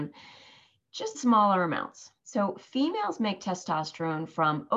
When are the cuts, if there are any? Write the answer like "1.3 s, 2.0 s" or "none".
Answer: 1.1 s, 2.2 s